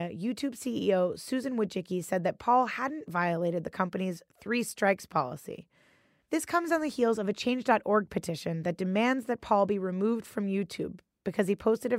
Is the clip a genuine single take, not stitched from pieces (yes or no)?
yes